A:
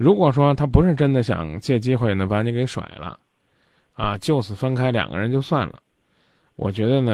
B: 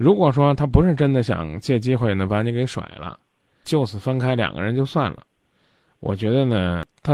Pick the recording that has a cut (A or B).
B